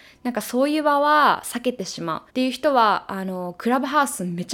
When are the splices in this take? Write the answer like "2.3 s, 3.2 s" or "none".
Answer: 2.3 s